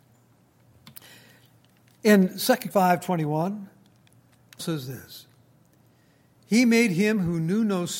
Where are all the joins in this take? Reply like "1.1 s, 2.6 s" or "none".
2.7 s, 4.6 s